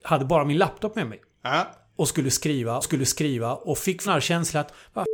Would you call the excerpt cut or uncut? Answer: cut